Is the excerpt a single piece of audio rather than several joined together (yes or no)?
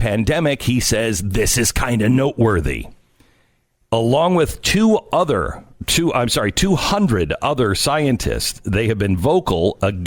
yes